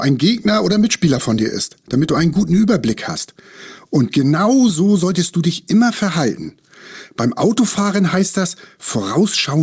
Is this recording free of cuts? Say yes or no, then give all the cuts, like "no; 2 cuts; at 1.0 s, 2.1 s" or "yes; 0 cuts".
yes; 0 cuts